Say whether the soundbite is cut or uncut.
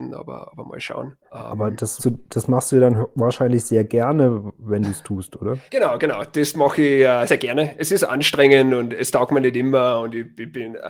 cut